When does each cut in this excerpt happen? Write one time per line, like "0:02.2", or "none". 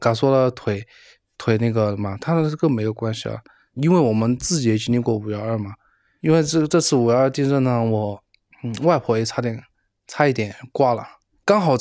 none

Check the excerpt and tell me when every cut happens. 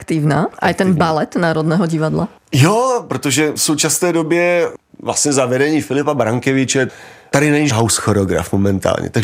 0:07.7

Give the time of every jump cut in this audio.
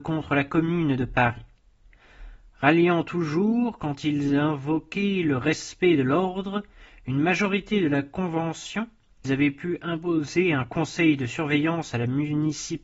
0:09.2

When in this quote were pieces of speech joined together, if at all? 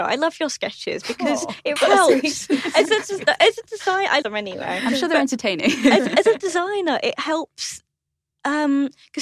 0:01.8
0:04.2

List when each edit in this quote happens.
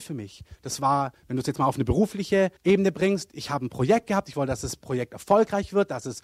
0:02.6

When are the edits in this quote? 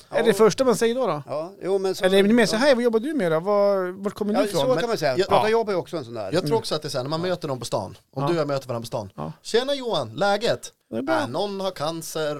0:10.8

